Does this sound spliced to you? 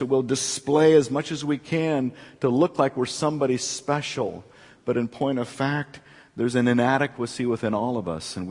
no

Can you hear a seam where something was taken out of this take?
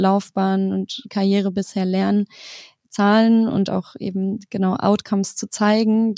no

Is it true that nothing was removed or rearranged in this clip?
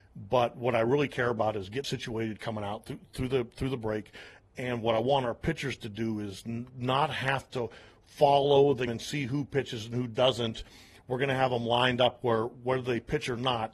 no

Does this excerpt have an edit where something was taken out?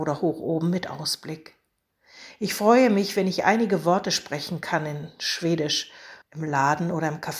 yes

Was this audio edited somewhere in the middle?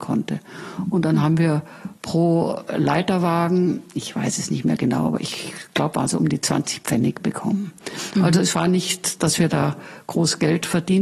no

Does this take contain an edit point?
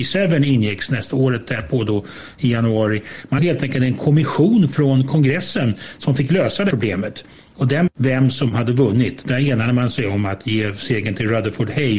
yes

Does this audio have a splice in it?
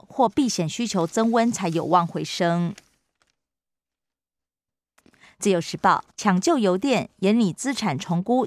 yes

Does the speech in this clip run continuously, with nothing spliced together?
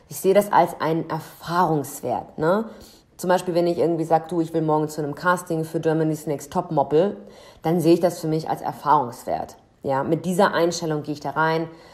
yes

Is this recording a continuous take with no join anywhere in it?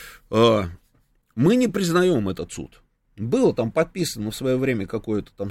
yes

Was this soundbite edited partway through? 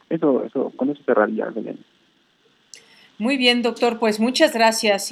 no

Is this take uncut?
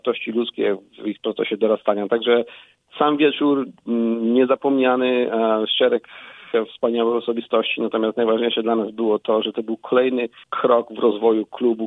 no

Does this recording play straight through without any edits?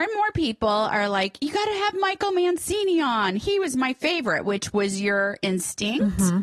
yes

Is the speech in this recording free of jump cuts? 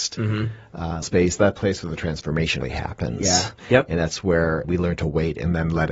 no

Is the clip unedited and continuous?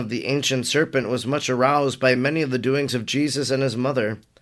yes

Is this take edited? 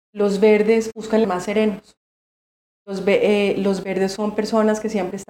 yes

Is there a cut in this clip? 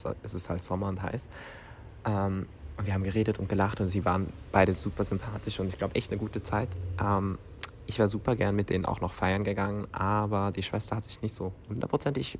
yes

